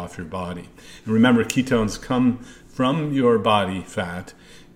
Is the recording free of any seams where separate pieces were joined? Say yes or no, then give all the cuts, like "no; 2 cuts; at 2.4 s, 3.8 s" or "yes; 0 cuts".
yes; 0 cuts